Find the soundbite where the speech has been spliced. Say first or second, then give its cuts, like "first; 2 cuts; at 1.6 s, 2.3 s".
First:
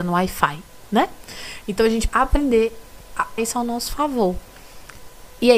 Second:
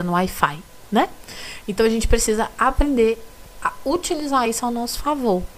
first; 2 cuts; at 2.1 s, 3.4 s